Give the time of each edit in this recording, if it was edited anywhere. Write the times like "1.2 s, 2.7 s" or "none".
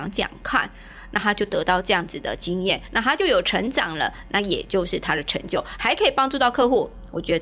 none

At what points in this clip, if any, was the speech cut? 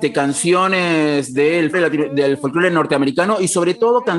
1.7 s

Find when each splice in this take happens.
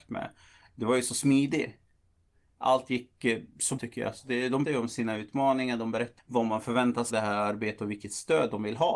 3.8 s, 4.6 s, 6.2 s, 7.1 s

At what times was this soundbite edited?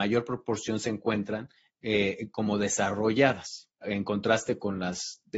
none

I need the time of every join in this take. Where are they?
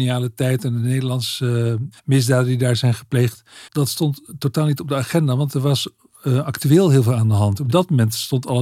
2.0 s, 3.7 s

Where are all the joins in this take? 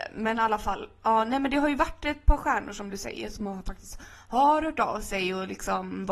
none

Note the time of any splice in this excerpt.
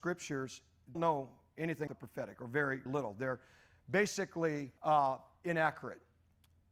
0.9 s, 1.9 s, 2.9 s, 4.8 s

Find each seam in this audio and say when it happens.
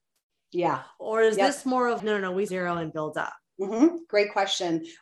2.0 s, 2.5 s

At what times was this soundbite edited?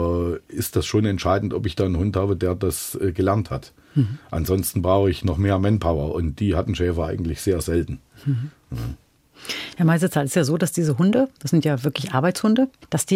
none

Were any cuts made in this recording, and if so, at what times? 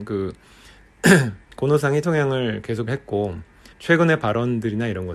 2.0 s, 2.9 s, 3.7 s

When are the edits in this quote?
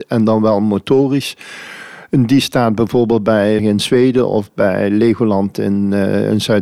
3.6 s

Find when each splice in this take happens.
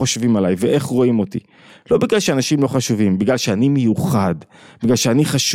none

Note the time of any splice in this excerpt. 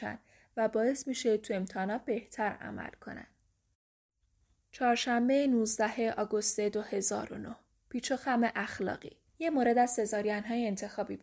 9.3 s

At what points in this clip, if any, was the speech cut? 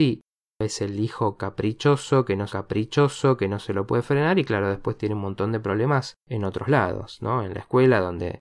2.5 s, 6.2 s

